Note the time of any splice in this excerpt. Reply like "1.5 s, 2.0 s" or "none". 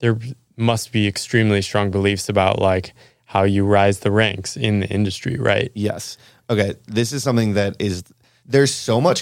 none

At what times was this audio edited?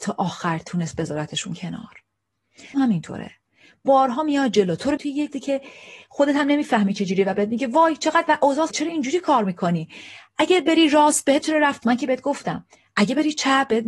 2.7 s, 5.0 s, 5.3 s, 8.7 s, 11.4 s, 11.8 s

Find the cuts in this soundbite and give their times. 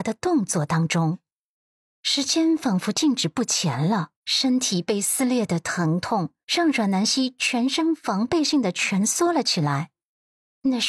4.2 s, 6.4 s

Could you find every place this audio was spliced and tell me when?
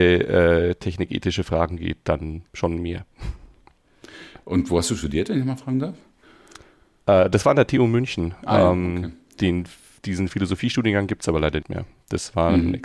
2.5 s, 11.6 s

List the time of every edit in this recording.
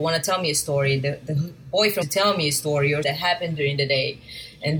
2.0 s, 3.0 s

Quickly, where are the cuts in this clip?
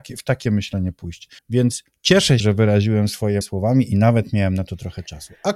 1.4 s, 2.4 s, 3.4 s

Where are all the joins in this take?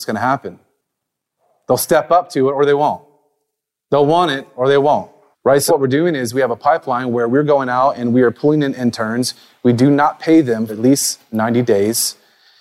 5.3 s, 5.7 s, 10.7 s

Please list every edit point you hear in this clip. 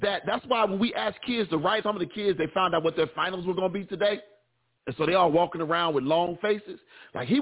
1.8 s

